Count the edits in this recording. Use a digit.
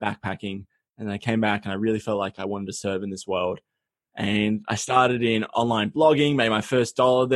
1